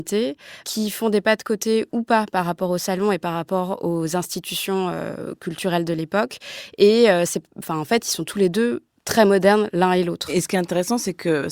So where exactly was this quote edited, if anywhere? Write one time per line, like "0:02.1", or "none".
none